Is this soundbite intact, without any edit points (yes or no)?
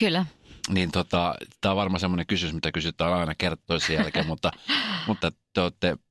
yes